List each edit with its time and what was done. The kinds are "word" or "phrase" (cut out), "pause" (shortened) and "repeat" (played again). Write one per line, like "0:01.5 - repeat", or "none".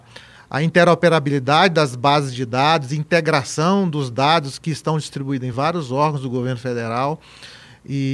none